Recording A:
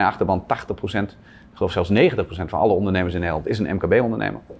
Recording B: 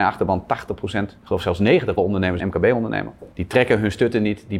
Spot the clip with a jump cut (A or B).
B